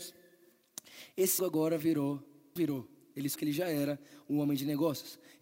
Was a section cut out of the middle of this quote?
yes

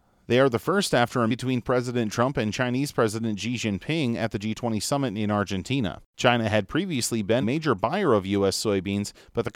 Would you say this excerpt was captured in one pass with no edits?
no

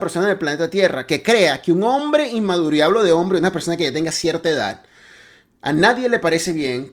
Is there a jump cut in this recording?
no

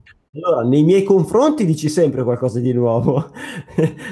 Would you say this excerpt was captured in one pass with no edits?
yes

